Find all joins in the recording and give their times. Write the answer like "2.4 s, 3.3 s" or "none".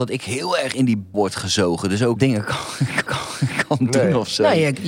1.1 s, 2.2 s, 3.1 s